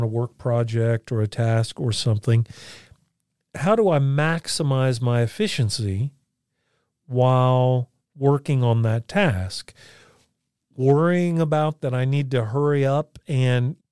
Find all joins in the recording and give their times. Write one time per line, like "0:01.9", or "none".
0:11.8